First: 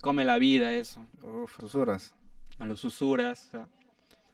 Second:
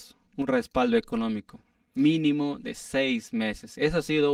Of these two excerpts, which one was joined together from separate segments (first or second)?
first